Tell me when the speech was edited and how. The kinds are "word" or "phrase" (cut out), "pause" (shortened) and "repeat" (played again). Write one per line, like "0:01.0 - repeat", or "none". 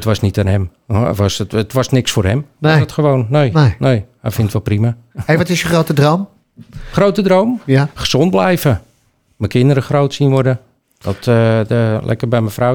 none